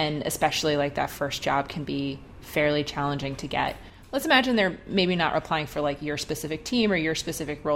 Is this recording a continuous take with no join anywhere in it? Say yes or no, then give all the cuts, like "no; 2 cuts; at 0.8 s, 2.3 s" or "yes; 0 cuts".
yes; 0 cuts